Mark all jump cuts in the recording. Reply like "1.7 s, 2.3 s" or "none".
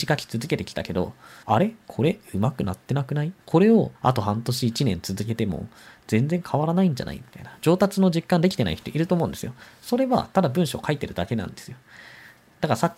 1.4 s, 3.4 s, 3.9 s

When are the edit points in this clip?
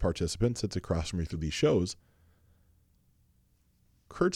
1.3 s

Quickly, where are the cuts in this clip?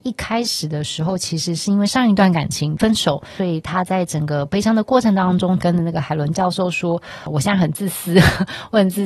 5.6 s

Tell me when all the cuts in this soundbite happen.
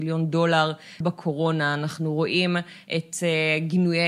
1.0 s

